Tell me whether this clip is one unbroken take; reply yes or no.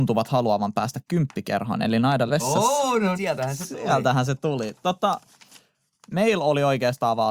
no